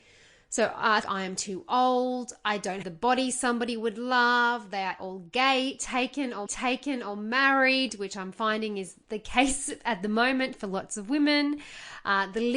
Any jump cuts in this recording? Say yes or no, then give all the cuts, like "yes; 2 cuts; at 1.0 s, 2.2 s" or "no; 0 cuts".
yes; 5 cuts; at 1.0 s, 2.8 s, 5.0 s, 6.5 s, 9.0 s